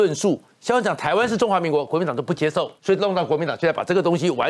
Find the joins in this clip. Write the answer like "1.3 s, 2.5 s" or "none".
2.8 s